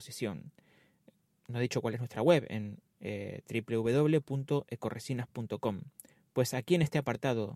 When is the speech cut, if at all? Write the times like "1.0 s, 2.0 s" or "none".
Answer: 6.1 s